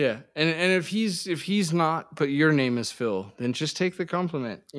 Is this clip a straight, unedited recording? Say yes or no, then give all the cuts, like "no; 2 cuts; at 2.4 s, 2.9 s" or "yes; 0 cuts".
yes; 0 cuts